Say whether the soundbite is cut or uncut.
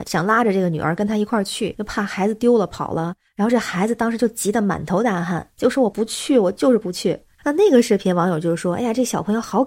uncut